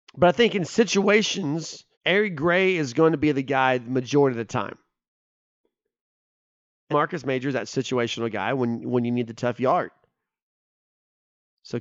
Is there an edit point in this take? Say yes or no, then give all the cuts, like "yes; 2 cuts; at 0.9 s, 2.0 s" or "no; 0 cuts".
yes; 2 cuts; at 1.9 s, 6.9 s